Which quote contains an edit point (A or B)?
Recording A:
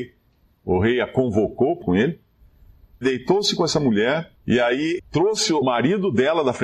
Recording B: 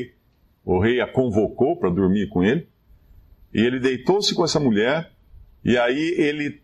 A